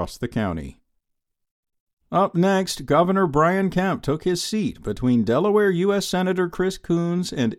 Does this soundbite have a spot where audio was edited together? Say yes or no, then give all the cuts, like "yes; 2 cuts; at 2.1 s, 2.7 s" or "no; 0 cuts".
no; 0 cuts